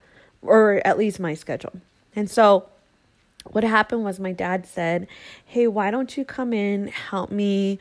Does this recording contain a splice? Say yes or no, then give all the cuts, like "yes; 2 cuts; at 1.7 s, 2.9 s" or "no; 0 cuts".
no; 0 cuts